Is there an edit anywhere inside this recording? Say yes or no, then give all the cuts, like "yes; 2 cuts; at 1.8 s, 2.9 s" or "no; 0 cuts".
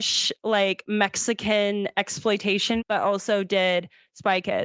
yes; 1 cut; at 2.8 s